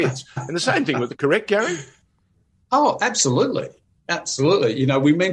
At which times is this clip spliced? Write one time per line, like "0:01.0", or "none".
0:01.2

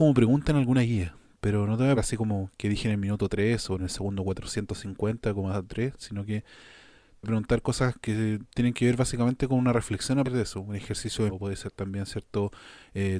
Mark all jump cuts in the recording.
0:02.0
0:03.8
0:07.2
0:10.2
0:11.3

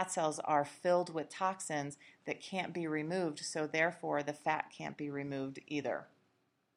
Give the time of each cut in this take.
none

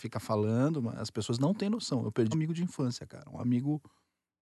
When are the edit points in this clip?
0:02.3

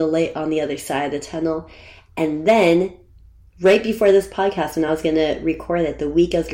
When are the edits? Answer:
none

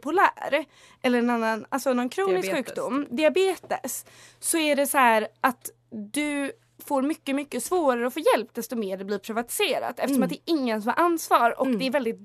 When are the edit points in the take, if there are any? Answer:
none

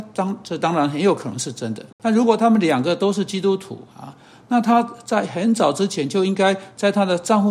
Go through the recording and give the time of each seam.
0:01.9
0:03.9

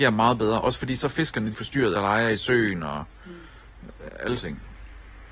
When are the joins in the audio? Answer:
0:01.5
0:01.9
0:04.4

